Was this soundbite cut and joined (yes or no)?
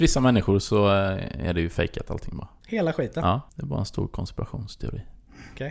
yes